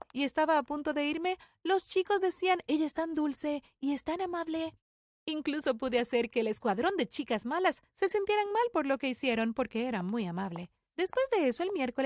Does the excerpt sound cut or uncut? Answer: uncut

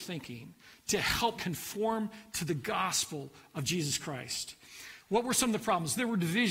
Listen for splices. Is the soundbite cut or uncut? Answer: cut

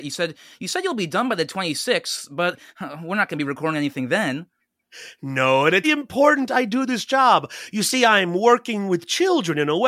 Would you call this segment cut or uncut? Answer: cut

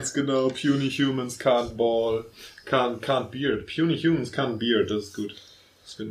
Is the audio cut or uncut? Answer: uncut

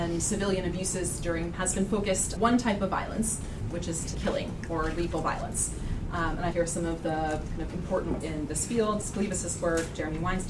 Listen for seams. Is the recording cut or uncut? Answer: cut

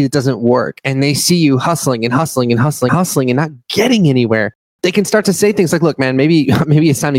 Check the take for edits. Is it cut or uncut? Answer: cut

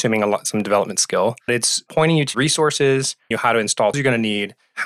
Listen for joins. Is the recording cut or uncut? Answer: cut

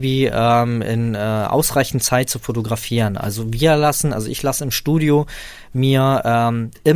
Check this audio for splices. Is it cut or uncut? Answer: uncut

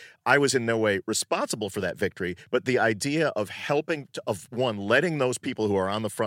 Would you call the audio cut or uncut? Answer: uncut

